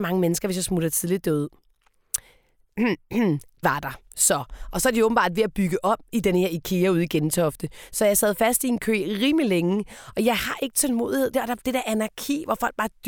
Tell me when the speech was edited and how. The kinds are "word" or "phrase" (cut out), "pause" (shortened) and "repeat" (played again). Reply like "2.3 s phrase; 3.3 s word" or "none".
3.6 s word; 11.3 s word

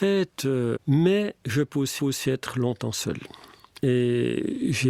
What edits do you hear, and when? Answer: 2.0 s repeat

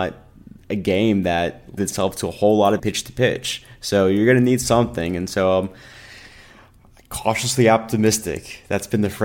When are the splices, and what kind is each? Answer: 1.8 s word; 2.8 s word

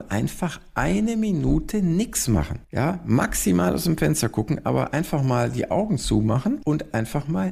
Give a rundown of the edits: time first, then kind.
2.6 s pause

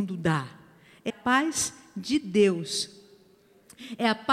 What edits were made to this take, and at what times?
1.1 s word

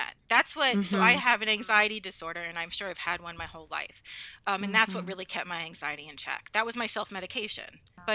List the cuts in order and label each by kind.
none

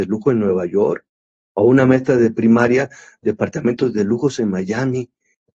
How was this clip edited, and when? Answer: none

